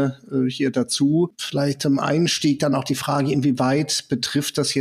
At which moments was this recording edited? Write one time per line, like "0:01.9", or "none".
none